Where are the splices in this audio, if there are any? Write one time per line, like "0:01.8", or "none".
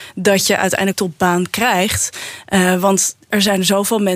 0:00.9

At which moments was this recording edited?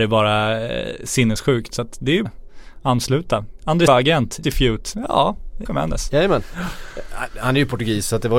0:02.3
0:03.9
0:04.4
0:05.7

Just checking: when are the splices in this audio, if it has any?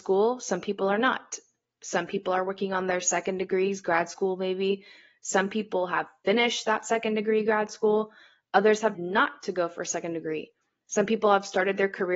0:08.9

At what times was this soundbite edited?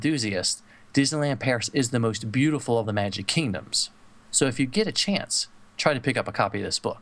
0:02.8

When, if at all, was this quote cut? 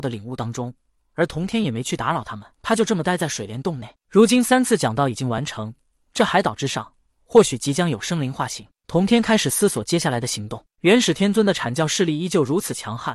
0:02.5

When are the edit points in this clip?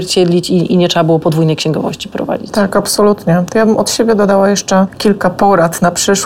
none

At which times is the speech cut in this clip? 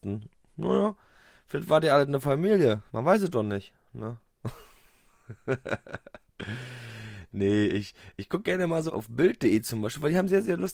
0:02.9
0:08.9

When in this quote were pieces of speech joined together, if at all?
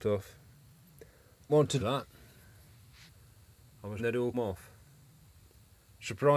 0:01.5
0:01.8
0:04.0
0:04.3

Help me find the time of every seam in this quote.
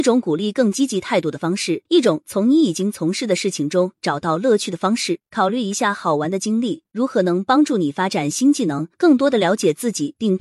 0:01.9
0:05.2
0:08.9

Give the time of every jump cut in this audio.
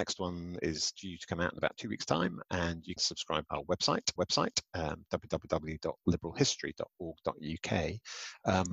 0:03.0
0:03.5
0:04.2

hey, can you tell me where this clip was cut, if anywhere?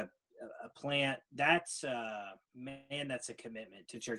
0:01.2
0:02.4

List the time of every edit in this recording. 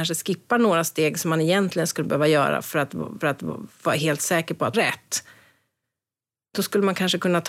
0:03.2
0:04.7

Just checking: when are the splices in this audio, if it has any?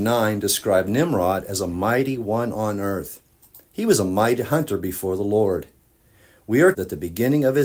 0:06.7

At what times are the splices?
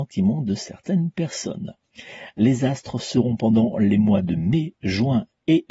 none

